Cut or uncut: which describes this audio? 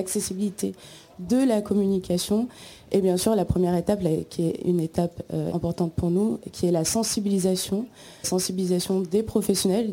cut